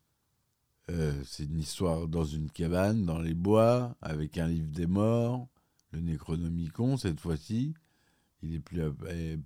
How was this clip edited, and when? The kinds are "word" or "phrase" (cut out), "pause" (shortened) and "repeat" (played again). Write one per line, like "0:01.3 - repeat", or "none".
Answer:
none